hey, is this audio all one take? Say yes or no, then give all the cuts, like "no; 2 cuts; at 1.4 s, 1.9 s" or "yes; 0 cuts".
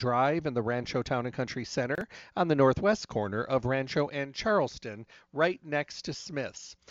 yes; 0 cuts